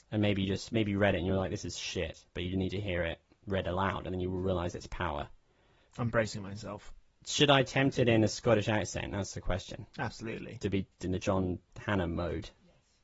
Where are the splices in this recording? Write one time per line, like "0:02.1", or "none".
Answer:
none